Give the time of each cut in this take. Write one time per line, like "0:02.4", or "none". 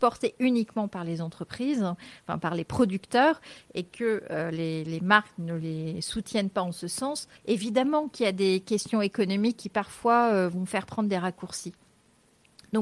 0:07.4

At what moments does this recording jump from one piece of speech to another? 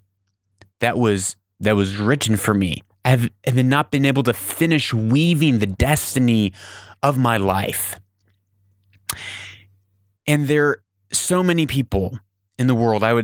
none

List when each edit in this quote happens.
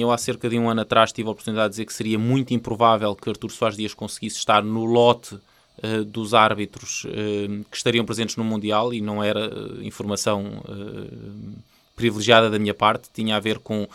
none

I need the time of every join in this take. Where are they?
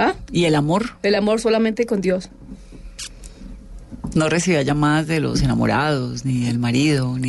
none

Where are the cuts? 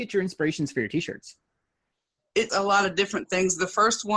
0:02.5

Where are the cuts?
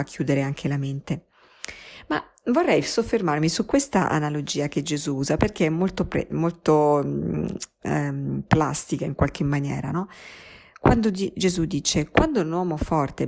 0:06.3

